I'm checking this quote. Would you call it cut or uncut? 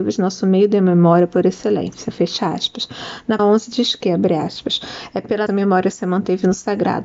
cut